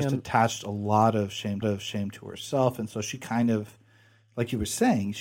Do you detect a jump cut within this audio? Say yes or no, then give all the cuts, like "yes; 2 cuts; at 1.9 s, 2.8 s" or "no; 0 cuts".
yes; 1 cut; at 1.6 s